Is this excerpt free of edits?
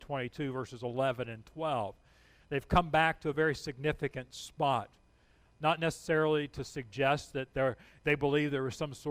yes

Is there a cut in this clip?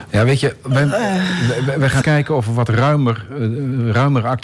yes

